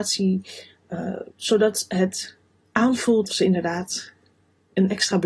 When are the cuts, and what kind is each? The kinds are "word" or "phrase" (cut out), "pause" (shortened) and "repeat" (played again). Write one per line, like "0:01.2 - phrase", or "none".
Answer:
0:01.3 - pause
0:03.3 - word